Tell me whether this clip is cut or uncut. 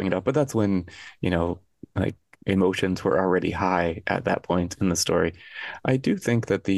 uncut